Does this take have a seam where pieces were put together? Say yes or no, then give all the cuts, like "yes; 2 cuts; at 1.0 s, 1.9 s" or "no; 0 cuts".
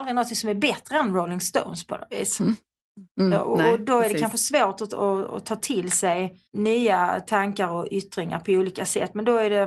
yes; 1 cut; at 6.5 s